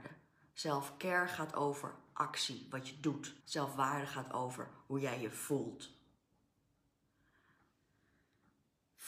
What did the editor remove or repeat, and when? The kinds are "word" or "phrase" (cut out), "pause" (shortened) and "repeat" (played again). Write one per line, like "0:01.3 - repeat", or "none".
0:03.4 - pause

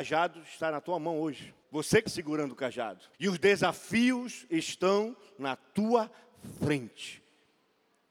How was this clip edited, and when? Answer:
0:01.6 - pause
0:02.1 - word
0:03.1 - pause

